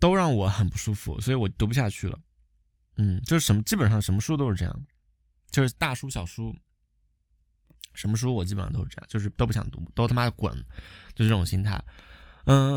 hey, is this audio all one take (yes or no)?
yes